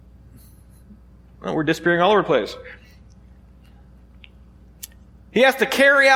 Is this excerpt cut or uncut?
uncut